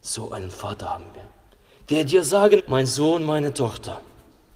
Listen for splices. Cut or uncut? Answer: cut